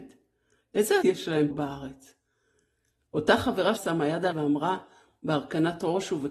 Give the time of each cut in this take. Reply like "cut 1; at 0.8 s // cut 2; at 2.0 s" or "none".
cut 1; at 1.0 s // cut 2; at 1.5 s // cut 3; at 3.8 s // cut 4; at 4.3 s